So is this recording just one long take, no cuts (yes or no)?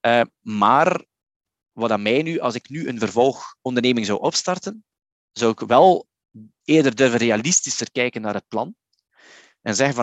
yes